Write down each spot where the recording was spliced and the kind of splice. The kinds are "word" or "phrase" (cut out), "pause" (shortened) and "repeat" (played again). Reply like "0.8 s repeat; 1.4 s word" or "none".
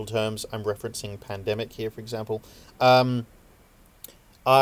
none